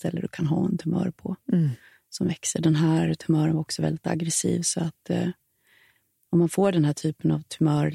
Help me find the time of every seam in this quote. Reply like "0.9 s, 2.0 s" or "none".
none